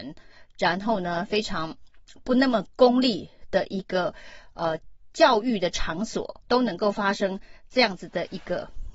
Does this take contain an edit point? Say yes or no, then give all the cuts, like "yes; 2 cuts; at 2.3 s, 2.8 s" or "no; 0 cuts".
yes; 1 cut; at 6.4 s